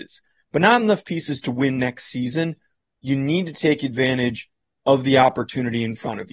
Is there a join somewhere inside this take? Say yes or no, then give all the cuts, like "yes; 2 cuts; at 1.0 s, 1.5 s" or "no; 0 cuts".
no; 0 cuts